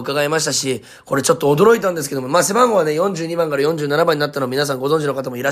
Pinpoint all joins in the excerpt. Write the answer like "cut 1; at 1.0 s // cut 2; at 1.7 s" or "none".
none